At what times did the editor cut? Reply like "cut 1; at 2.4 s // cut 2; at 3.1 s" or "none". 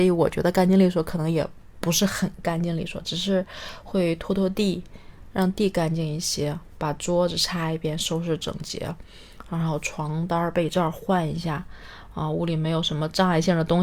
none